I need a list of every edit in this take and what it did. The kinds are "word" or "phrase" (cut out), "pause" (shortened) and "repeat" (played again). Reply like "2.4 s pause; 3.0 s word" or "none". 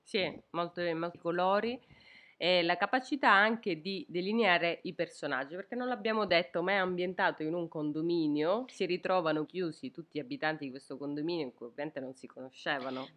1.1 s word; 9.5 s word